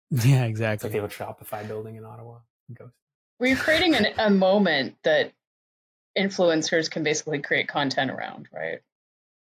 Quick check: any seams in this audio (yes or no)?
no